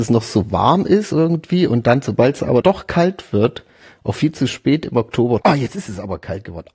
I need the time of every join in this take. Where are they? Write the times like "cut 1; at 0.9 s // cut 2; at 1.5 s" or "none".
cut 1; at 2.6 s // cut 2; at 5.4 s